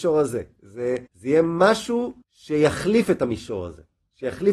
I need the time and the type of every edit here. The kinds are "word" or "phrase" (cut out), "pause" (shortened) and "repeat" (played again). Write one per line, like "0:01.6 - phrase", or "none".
0:01.1 - pause
0:02.2 - pause